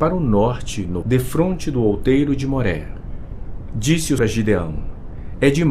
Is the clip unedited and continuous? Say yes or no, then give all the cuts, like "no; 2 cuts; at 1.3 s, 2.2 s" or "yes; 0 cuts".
no; 2 cuts; at 1.0 s, 4.2 s